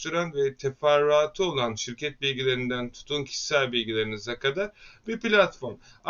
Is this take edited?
no; 0 cuts

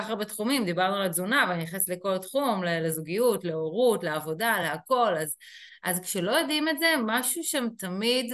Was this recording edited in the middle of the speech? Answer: no; 0 cuts

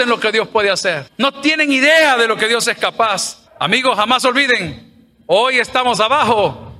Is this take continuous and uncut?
no; 2 cuts; at 1.1 s, 3.5 s

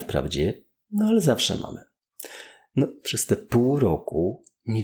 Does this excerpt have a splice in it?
no; 0 cuts

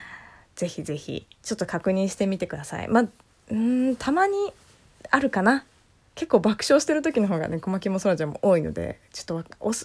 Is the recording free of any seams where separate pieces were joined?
yes; 0 cuts

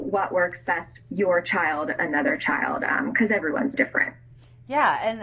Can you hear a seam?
yes; 3 cuts; at 1.0 s, 2.0 s, 3.7 s

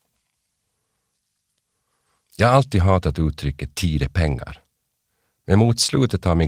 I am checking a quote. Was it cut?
no; 0 cuts

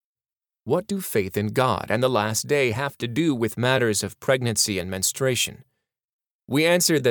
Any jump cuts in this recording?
no; 0 cuts

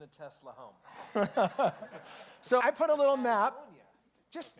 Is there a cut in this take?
yes; 1 cut; at 2.6 s

